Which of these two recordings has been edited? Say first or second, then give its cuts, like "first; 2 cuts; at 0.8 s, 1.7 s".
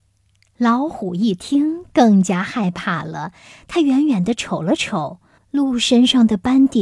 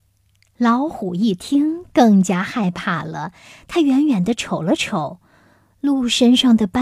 first; 1 cut; at 5.4 s